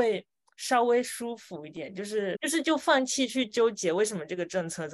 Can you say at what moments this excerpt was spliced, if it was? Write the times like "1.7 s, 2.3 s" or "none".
2.3 s